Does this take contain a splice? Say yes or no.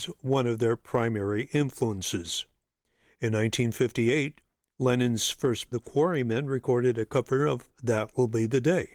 yes